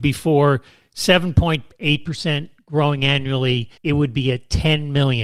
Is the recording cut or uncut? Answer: cut